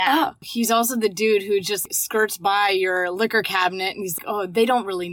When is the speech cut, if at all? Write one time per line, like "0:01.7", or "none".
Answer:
none